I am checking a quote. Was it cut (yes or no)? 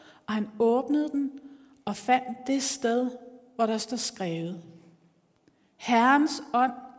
no